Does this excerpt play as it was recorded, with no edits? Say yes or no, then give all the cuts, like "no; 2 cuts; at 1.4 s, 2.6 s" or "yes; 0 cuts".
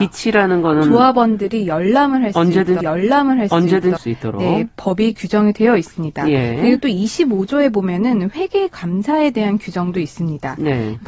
no; 2 cuts; at 2.8 s, 4.0 s